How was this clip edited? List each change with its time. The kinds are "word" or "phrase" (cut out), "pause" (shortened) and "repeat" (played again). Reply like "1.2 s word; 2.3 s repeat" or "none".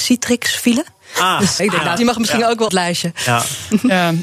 1.6 s word; 2.0 s word; 2.7 s phrase